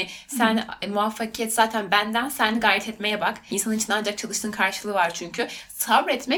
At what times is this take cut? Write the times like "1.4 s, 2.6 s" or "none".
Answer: none

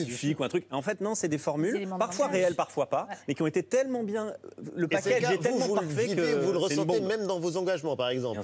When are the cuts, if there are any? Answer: none

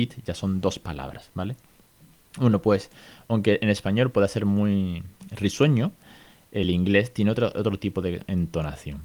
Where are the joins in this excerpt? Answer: none

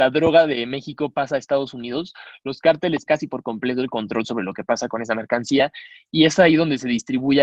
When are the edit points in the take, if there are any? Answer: 3.1 s

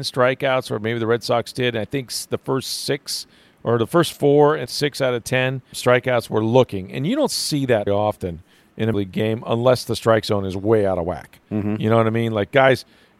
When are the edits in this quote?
4.7 s, 5.7 s, 7.9 s, 8.9 s

